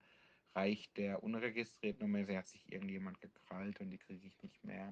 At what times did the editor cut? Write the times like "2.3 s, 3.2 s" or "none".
none